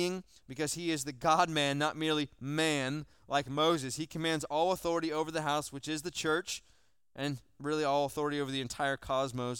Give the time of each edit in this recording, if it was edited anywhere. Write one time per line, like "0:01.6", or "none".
none